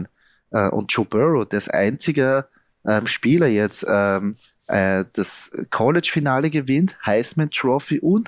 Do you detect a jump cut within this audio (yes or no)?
no